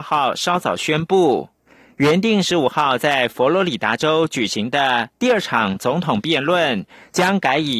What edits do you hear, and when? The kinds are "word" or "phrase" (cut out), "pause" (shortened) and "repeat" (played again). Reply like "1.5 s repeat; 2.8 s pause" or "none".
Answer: none